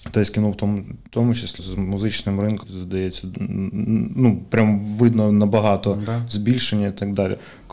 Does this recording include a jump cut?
yes; 3 cuts; at 1.1 s, 1.6 s, 2.6 s

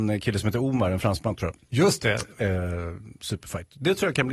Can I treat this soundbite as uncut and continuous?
yes; 0 cuts

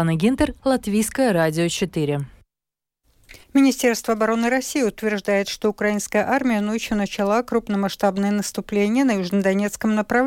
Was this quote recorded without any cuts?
no; 1 cut; at 3.4 s

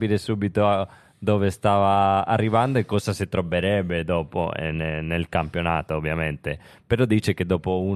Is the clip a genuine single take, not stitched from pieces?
yes; 0 cuts

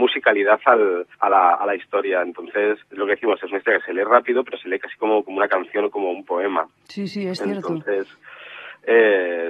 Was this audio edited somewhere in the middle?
yes; 3 cuts; at 1.1 s, 2.9 s, 6.8 s

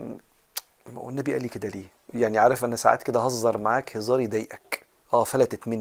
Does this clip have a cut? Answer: yes; 1 cut; at 2.0 s

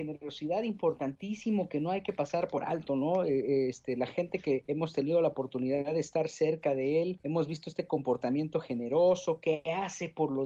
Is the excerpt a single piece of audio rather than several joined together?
yes; 0 cuts

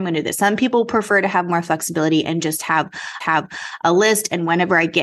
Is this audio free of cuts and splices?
no; 1 cut; at 3.2 s

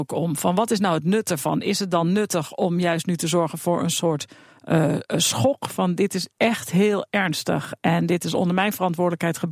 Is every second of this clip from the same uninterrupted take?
yes; 0 cuts

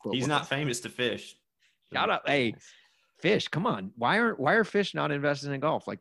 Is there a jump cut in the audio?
yes; 2 cuts; at 1.4 s, 3.9 s

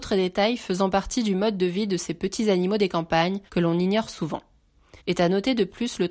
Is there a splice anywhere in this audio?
yes; 2 cuts; at 3.5 s, 5.0 s

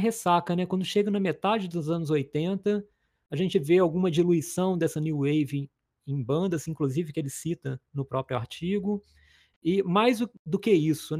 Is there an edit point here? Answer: no; 0 cuts

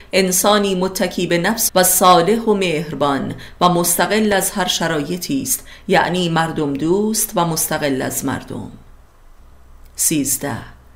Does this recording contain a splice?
yes; 1 cut; at 1.7 s

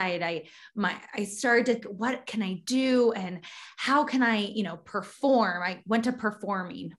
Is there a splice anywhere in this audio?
yes; 1 cut; at 1.8 s

